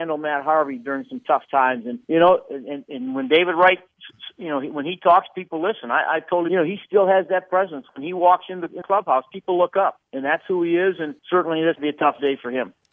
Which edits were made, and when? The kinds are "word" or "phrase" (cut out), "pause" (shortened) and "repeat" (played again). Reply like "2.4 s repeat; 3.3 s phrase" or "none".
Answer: 2.0 s pause; 6.5 s phrase; 8.8 s word; 10.1 s pause; 11.2 s pause; 11.7 s word

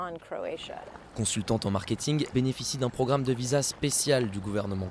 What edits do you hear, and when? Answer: 2.3 s word

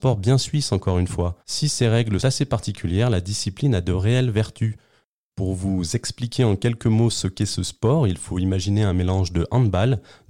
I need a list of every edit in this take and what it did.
1.4 s pause; 2.2 s word

